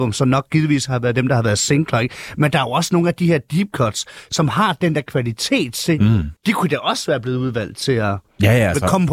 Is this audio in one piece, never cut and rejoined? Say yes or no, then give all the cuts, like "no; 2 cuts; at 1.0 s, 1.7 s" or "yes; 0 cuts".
no; 1 cut; at 6.4 s